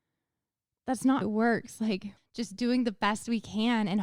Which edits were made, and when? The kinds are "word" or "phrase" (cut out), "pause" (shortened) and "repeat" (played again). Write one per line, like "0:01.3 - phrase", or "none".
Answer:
0:01.2 - word
0:02.2 - phrase